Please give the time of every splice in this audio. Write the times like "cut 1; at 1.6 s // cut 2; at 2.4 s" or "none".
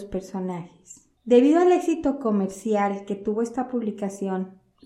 cut 1; at 1.2 s